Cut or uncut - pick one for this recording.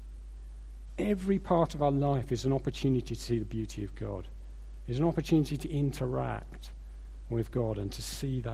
uncut